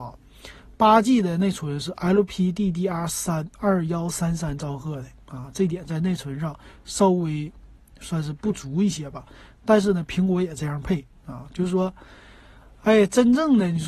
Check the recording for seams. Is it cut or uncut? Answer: uncut